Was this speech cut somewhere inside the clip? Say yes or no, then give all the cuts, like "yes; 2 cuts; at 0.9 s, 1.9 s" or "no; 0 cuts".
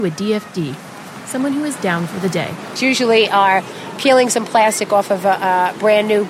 yes; 1 cut; at 2.8 s